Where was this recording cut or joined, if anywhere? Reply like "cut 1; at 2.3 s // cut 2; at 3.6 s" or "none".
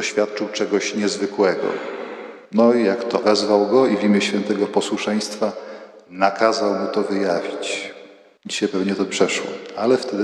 cut 1; at 2.4 s // cut 2; at 3.2 s // cut 3; at 9.1 s

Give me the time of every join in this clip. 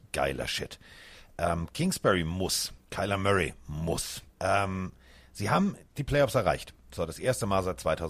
cut 1; at 2.8 s // cut 2; at 4.3 s

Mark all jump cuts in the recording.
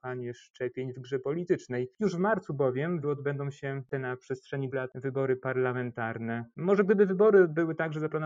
cut 1; at 3.0 s // cut 2; at 3.9 s // cut 3; at 4.7 s

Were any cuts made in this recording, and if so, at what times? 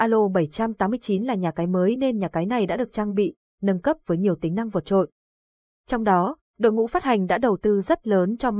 none

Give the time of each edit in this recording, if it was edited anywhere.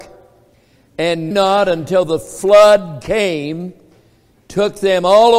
cut 1; at 1.3 s

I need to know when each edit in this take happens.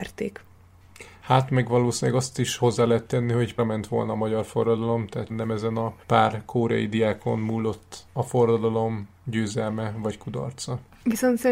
cut 1; at 3.6 s // cut 2; at 5.3 s // cut 3; at 6.0 s // cut 4; at 8.1 s

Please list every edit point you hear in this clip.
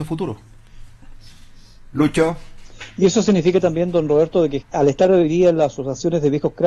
cut 1; at 4.6 s

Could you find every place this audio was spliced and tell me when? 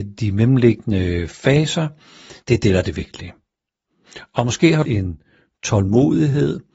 cut 1; at 2.4 s // cut 2; at 4.8 s

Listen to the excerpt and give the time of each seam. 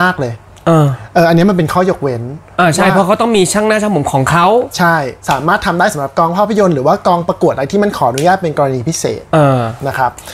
cut 1; at 5.2 s

